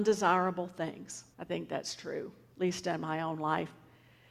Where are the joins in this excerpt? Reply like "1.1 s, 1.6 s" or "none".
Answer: 1.3 s

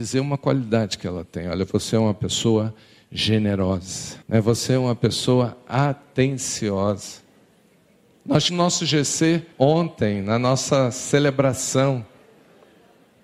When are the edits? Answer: 4.2 s, 8.5 s, 9.5 s

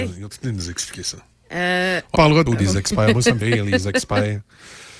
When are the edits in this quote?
2.1 s, 2.5 s, 3.4 s

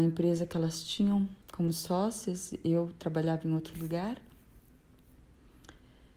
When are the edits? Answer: 1.4 s

